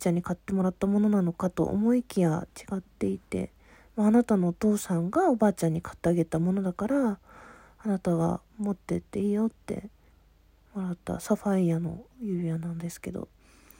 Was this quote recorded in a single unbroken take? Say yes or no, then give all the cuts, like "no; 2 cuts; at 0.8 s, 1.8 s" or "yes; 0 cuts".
no; 2 cuts; at 8.5 s, 10.1 s